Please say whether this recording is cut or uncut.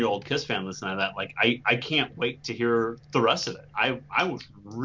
uncut